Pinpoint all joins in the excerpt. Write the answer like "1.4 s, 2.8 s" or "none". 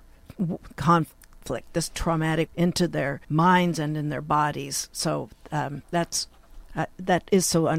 2.5 s, 3.2 s